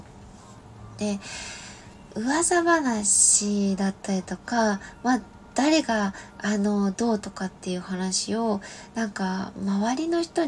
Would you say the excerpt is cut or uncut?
uncut